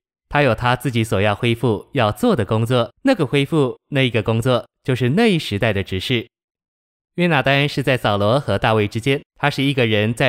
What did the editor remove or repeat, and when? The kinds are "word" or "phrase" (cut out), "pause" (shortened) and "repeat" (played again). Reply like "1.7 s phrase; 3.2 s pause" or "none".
2.9 s pause; 9.3 s pause